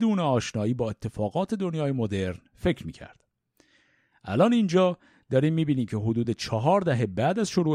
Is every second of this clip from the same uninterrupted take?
yes; 0 cuts

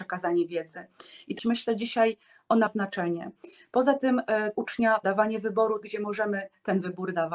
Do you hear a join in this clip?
yes; 5 cuts; at 1.4 s, 2.7 s, 4.5 s, 5.0 s, 5.8 s

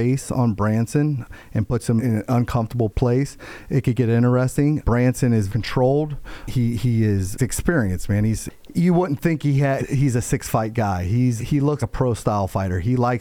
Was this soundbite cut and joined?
yes; 6 cuts; at 2.0 s, 5.5 s, 7.4 s, 9.8 s, 11.4 s, 11.8 s

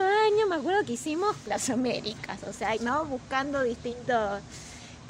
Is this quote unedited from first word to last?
no; 2 cuts; at 1.5 s, 2.8 s

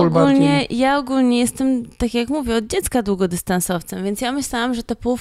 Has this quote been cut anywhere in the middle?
no; 0 cuts

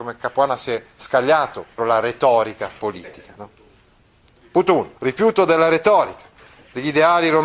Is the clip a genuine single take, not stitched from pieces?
no; 2 cuts; at 1.8 s, 5.0 s

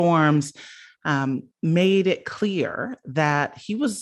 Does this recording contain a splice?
yes; 1 cut; at 1.5 s

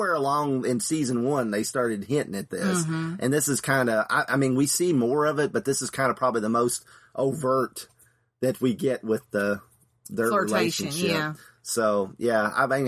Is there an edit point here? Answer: no; 0 cuts

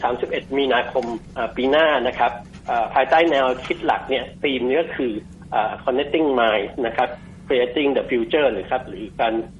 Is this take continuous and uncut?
yes; 0 cuts

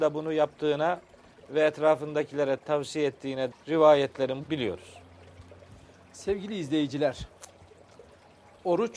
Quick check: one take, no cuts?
no; 3 cuts; at 2.6 s, 3.5 s, 4.4 s

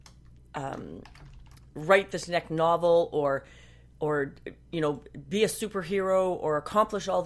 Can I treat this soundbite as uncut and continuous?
yes; 0 cuts

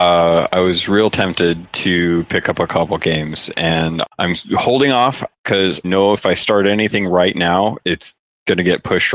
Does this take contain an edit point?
yes; 3 cuts; at 4.0 s, 5.8 s, 7.8 s

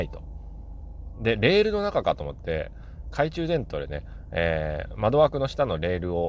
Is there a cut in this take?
no; 0 cuts

